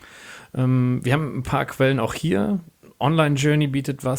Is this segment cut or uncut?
uncut